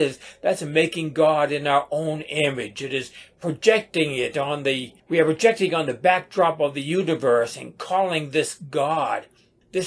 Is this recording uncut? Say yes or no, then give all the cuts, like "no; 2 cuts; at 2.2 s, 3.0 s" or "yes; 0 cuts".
yes; 0 cuts